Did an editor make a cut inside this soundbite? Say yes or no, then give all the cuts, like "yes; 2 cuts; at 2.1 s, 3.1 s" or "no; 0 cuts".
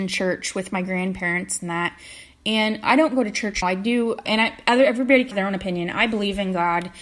yes; 3 cuts; at 3.6 s, 4.3 s, 5.3 s